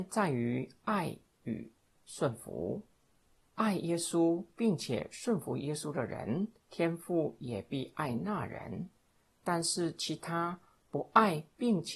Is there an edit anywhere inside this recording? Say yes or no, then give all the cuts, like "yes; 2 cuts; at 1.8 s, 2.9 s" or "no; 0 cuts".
yes; 1 cut; at 6.6 s